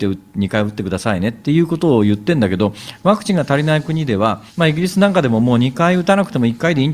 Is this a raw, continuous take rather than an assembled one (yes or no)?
no